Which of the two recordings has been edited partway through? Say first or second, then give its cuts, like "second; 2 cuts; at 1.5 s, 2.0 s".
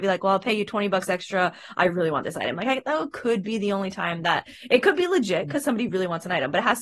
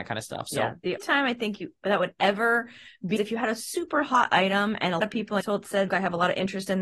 second; 5 cuts; at 1.0 s, 3.2 s, 5.0 s, 5.4 s, 5.9 s